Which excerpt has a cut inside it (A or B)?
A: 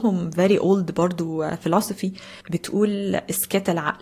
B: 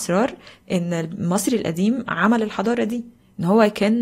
A